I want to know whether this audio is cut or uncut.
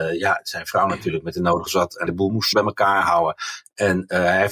cut